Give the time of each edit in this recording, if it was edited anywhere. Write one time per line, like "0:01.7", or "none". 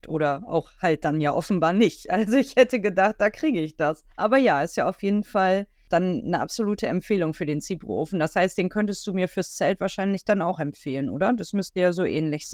0:04.1